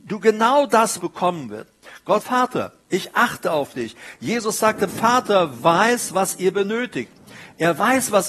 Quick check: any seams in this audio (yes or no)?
yes